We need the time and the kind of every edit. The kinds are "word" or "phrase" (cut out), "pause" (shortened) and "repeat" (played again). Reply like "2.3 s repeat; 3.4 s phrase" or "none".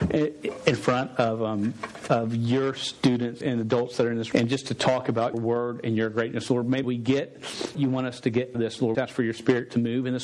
2.1 s word; 3.4 s word; 4.3 s word; 5.3 s word; 6.8 s word; 7.7 s word; 8.5 s word; 8.9 s word